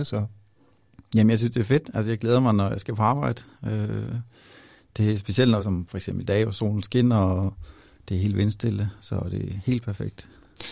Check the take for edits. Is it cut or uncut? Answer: cut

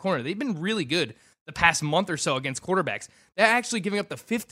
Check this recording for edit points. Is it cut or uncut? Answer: uncut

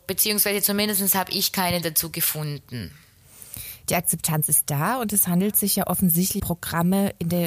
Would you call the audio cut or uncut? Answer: cut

